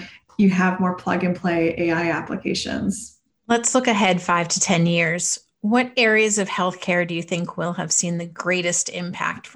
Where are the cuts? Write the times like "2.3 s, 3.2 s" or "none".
none